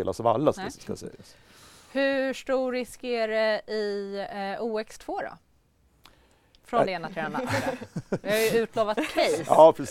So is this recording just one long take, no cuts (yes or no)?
yes